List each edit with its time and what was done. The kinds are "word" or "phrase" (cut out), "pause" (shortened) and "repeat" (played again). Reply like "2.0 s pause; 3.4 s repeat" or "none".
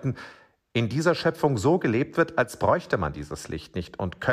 none